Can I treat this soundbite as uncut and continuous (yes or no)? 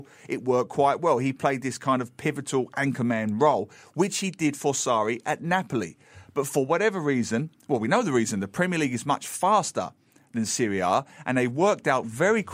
yes